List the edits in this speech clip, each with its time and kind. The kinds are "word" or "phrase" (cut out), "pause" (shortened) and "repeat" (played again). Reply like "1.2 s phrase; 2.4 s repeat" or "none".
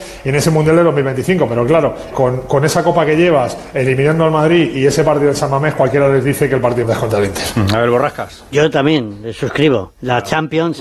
2.1 s word; 6.8 s word